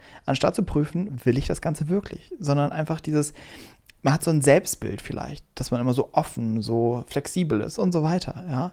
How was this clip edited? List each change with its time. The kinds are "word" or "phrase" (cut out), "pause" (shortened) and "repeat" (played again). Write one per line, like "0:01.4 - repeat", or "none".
none